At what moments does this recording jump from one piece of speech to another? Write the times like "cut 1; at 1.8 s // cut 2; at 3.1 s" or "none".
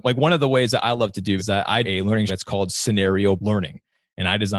cut 1; at 1.4 s // cut 2; at 1.8 s // cut 3; at 2.3 s // cut 4; at 3.4 s